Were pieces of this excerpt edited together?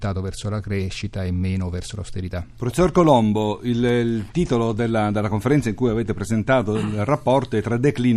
no; 0 cuts

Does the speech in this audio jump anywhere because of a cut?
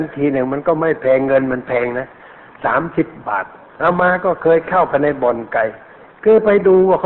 no; 0 cuts

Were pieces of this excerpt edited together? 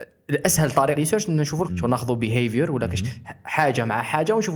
yes; 2 cuts; at 1.0 s, 1.7 s

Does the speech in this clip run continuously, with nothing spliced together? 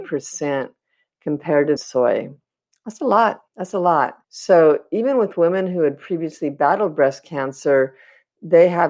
no; 3 cuts; at 1.8 s, 3.5 s, 4.2 s

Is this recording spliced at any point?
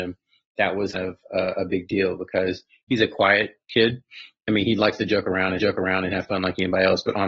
yes; 3 cuts; at 0.9 s, 3.6 s, 5.6 s

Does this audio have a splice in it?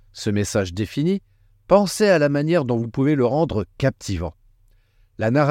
no; 0 cuts

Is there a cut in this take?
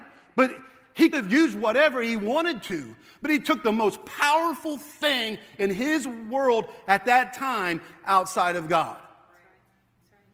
yes; 1 cut; at 1.1 s

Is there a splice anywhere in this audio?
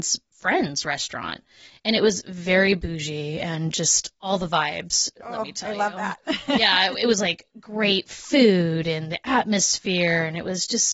no; 0 cuts

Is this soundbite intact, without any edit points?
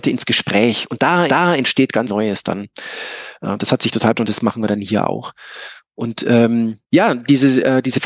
no; 4 cuts; at 1.3 s, 2.1 s, 4.1 s, 6.8 s

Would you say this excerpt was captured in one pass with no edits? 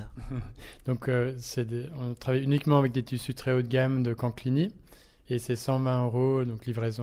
yes; 0 cuts

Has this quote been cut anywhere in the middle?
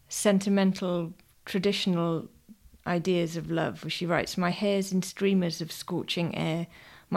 no; 0 cuts

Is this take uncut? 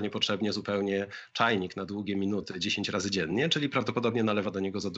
yes; 0 cuts

